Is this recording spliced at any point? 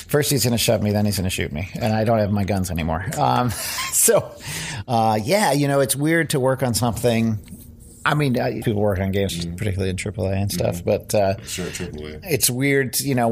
yes; 2 cuts; at 8.6 s, 9.3 s

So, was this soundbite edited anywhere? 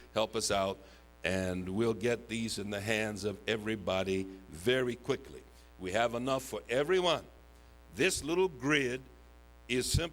no; 0 cuts

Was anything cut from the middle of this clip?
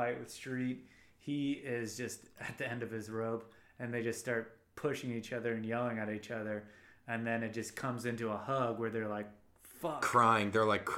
no; 0 cuts

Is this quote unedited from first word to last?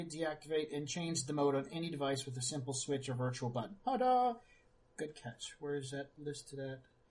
yes; 0 cuts

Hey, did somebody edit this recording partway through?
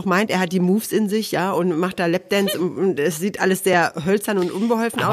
no; 0 cuts

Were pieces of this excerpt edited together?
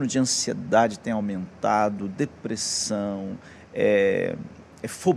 no; 0 cuts

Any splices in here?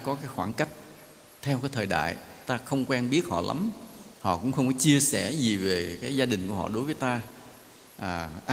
no; 0 cuts

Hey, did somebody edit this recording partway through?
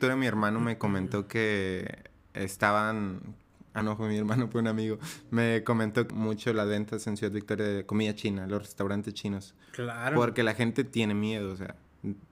yes; 2 cuts; at 3.8 s, 6.1 s

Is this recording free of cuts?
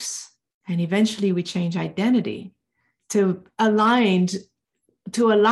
yes; 0 cuts

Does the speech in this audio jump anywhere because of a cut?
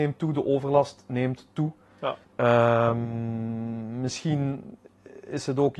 yes; 1 cut; at 2.2 s

